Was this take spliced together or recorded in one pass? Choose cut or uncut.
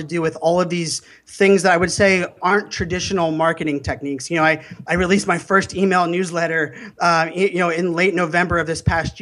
uncut